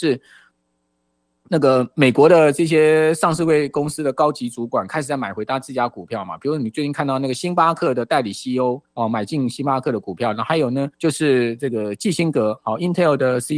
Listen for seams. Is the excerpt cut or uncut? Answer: cut